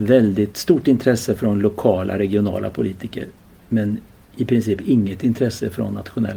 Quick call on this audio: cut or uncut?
uncut